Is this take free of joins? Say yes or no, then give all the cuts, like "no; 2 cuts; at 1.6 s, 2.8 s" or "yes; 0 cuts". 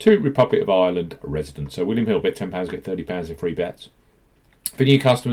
yes; 0 cuts